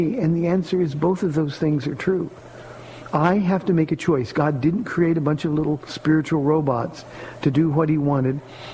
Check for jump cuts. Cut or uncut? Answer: uncut